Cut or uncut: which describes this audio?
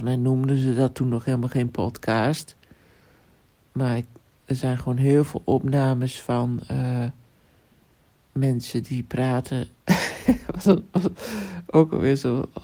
uncut